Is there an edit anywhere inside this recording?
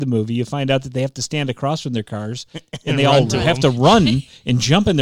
no; 0 cuts

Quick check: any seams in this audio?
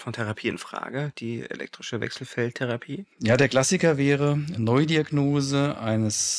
yes; 1 cut; at 3.1 s

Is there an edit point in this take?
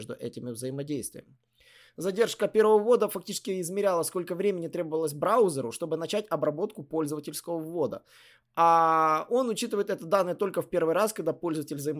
no; 0 cuts

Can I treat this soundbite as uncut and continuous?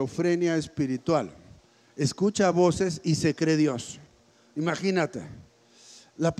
yes; 0 cuts

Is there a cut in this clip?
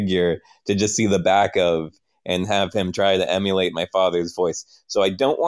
no; 0 cuts

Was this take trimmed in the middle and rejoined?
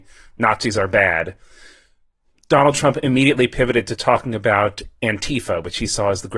no; 0 cuts

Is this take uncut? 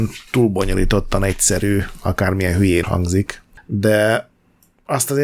no; 1 cut; at 2.8 s

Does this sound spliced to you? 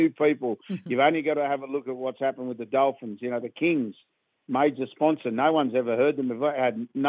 no; 0 cuts

